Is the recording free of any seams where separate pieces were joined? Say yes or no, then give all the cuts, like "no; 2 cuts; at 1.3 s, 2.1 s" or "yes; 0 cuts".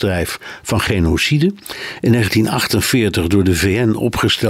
yes; 0 cuts